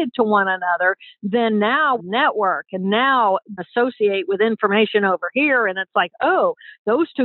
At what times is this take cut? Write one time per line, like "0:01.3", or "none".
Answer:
0:02.0
0:03.6